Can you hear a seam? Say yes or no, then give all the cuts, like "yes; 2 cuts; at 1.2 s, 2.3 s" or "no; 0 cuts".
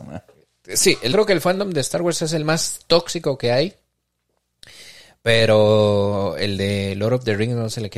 yes; 1 cut; at 1.1 s